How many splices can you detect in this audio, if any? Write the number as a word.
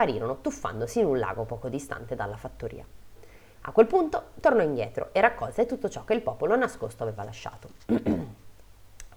zero